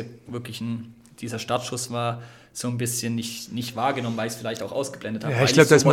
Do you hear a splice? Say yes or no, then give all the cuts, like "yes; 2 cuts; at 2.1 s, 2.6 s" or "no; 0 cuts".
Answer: no; 0 cuts